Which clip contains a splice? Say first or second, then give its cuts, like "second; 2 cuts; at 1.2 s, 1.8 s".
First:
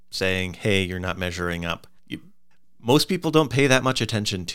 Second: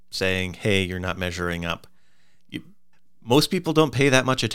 first; 1 cut; at 2.0 s